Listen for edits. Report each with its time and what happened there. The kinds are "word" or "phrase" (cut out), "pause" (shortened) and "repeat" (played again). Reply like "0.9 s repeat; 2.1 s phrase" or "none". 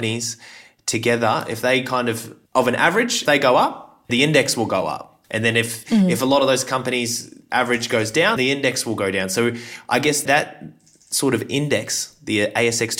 2.5 s pause; 3.3 s word; 4.1 s word; 5.2 s pause; 8.4 s word; 10.3 s word